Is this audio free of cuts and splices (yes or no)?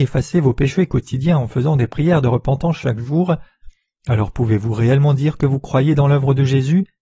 yes